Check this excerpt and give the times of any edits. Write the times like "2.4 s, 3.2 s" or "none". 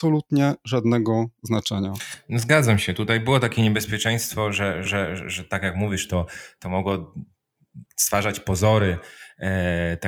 4.9 s, 7.9 s